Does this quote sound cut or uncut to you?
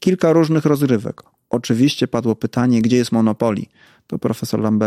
uncut